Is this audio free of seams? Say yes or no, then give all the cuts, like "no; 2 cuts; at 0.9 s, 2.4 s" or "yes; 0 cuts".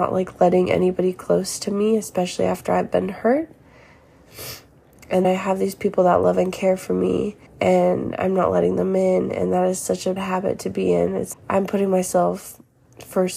no; 4 cuts; at 5.2 s, 7.5 s, 10.2 s, 11.3 s